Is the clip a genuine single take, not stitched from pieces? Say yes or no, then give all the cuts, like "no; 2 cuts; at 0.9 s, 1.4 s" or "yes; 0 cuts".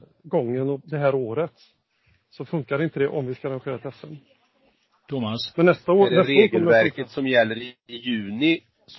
yes; 0 cuts